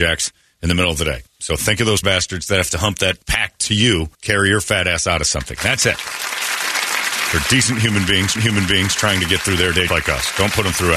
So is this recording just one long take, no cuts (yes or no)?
no